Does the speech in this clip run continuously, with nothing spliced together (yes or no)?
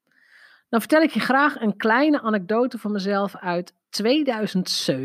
no